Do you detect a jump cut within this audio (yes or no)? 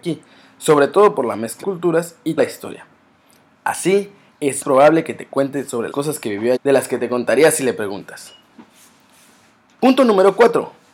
yes